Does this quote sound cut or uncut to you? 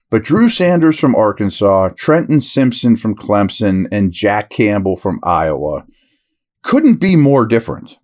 uncut